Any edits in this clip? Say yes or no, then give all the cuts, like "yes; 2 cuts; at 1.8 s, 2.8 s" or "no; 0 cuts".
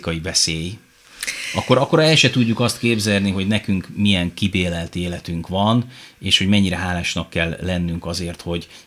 no; 0 cuts